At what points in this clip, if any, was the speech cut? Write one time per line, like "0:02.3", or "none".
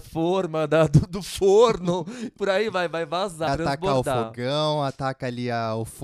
0:03.5